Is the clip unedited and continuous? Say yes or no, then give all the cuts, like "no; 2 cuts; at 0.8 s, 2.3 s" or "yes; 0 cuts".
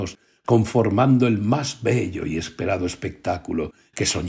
yes; 0 cuts